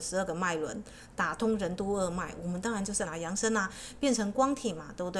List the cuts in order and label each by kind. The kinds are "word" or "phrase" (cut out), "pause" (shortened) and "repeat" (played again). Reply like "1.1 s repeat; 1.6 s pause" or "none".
3.1 s word